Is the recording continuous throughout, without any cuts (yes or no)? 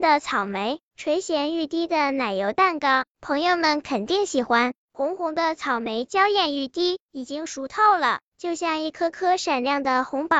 no